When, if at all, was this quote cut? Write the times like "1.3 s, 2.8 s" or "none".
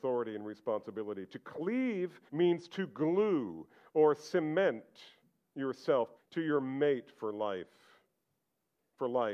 2.3 s, 6.2 s